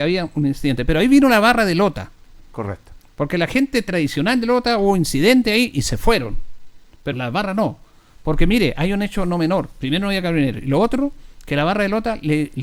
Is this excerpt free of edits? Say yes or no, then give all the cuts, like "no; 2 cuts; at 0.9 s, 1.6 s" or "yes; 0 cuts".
no; 1 cut; at 7.1 s